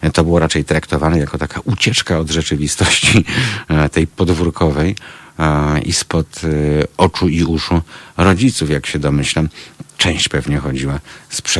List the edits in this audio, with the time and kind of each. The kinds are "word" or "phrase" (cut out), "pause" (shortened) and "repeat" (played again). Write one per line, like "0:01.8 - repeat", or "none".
none